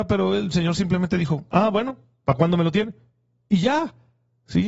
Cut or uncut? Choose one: uncut